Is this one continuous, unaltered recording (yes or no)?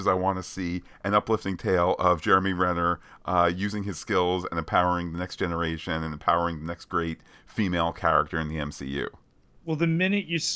yes